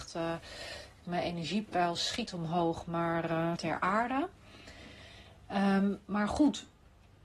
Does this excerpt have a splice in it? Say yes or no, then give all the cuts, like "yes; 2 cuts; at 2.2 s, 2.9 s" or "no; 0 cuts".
yes; 2 cuts; at 2.3 s, 3.6 s